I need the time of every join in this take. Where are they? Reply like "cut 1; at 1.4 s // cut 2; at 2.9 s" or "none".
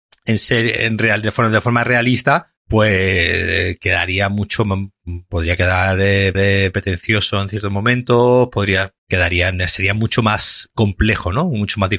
cut 1; at 2.6 s // cut 2; at 6.3 s // cut 3; at 9.0 s